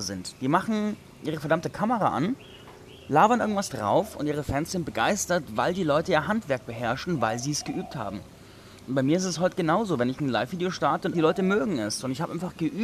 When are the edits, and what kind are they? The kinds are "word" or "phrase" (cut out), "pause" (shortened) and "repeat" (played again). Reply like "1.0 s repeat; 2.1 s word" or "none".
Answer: 11.1 s phrase